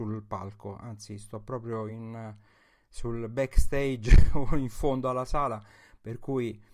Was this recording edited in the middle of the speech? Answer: no; 0 cuts

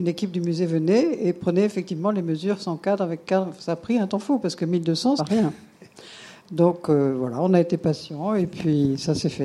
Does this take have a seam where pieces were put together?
yes; 1 cut; at 5.2 s

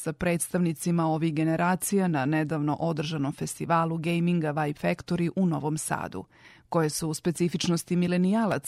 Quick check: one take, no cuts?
yes; 0 cuts

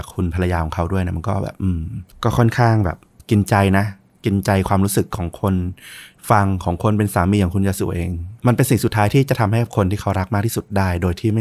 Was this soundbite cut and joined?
yes; 1 cut; at 8.4 s

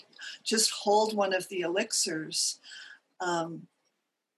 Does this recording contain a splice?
no; 0 cuts

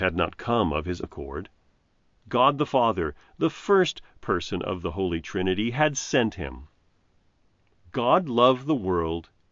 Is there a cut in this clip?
yes; 1 cut; at 1.0 s

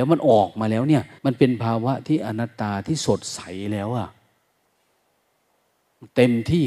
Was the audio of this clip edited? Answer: yes; 1 cut; at 1.2 s

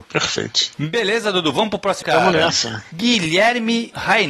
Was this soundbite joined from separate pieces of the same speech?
yes; 1 cut; at 2.0 s

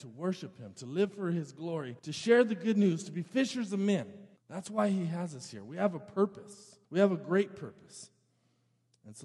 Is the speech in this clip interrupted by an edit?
yes; 3 cuts; at 2.0 s, 4.4 s, 6.8 s

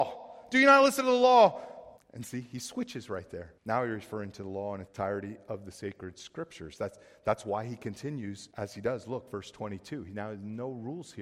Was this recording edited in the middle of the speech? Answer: yes; 4 cuts; at 2.0 s, 3.6 s, 4.9 s, 8.5 s

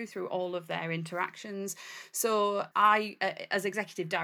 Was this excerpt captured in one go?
no; 1 cut; at 2.7 s

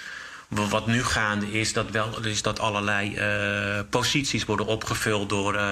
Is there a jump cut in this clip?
no; 0 cuts

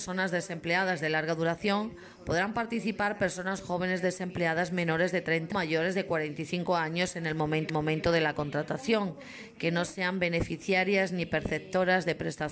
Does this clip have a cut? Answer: yes; 2 cuts; at 5.5 s, 7.7 s

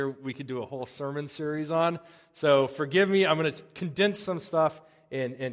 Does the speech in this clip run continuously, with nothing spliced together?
yes; 0 cuts

